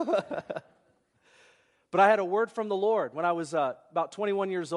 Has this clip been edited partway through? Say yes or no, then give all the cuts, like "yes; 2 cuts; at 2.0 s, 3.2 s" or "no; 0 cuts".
no; 0 cuts